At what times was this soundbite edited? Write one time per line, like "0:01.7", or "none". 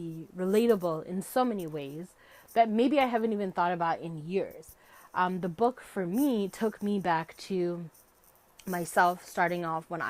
none